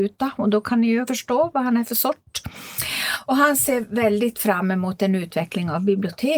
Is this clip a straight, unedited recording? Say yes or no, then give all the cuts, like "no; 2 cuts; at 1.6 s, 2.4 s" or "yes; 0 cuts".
no; 1 cut; at 1.1 s